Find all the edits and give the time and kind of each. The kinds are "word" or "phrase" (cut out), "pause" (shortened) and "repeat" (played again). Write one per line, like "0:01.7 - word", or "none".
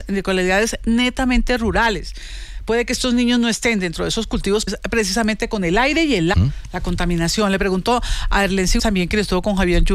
0:04.7 - word
0:06.3 - word
0:08.8 - word

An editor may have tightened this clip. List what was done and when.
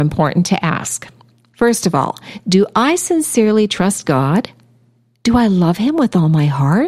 none

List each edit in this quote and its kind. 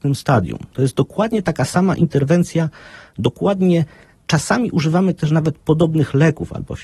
none

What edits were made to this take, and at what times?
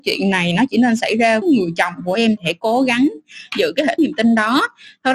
0:01.4 - word
0:02.4 - word
0:04.0 - word

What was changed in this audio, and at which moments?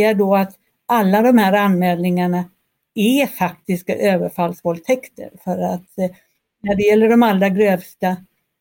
none

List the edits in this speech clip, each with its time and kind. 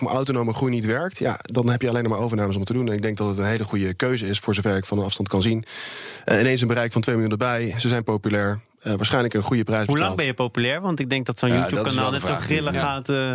none

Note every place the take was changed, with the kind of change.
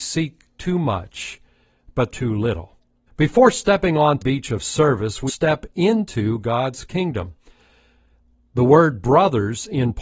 0:02.1 - phrase
0:03.1 - pause
0:04.2 - word
0:05.3 - phrase

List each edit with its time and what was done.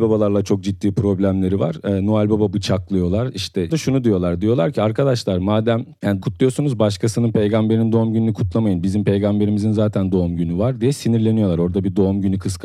0:03.7 - word
0:06.2 - phrase

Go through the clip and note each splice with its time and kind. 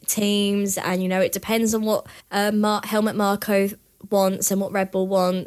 0:02.2 - pause

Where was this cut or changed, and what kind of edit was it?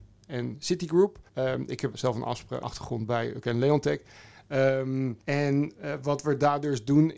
0:01.3 - pause
0:01.9 - word
0:02.6 - word
0:03.4 - word
0:05.2 - pause

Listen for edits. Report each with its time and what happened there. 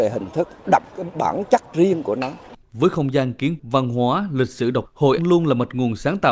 0:02.6 - pause
0:03.6 - word
0:04.8 - word
0:05.2 - word

